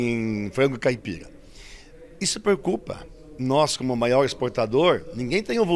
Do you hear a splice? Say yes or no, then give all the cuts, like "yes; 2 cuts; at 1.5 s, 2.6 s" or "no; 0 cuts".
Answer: yes; 1 cut; at 3.4 s